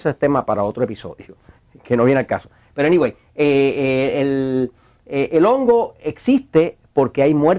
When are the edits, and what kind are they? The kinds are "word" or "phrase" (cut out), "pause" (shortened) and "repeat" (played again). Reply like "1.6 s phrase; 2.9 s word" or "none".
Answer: none